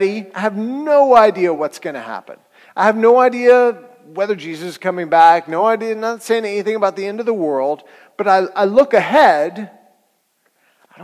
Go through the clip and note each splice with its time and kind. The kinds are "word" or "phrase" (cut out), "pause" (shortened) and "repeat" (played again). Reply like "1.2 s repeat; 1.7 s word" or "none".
none